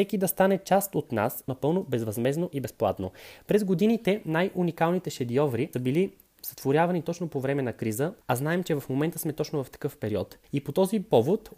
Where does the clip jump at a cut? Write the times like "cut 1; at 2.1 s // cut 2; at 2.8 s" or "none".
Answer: cut 1; at 1.5 s // cut 2; at 5.7 s // cut 3; at 8.2 s // cut 4; at 10.4 s